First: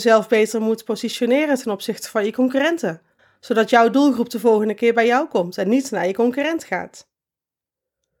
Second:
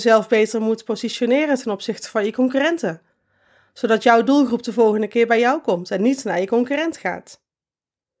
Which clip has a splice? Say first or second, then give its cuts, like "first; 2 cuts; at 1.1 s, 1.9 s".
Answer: first; 1 cut; at 3.2 s